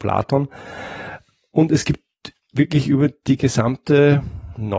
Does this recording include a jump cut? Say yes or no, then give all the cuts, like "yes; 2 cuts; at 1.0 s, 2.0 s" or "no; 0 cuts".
no; 0 cuts